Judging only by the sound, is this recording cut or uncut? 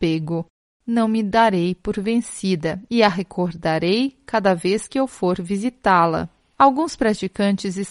uncut